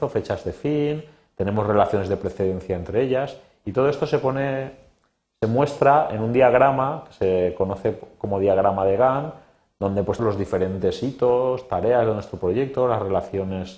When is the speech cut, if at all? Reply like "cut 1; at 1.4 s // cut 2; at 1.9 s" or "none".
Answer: cut 1; at 10.2 s